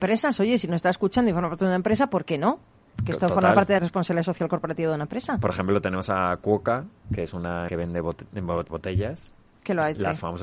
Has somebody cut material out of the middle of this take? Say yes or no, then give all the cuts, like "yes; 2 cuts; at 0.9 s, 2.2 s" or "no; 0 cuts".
yes; 3 cuts; at 3.8 s, 7.7 s, 8.7 s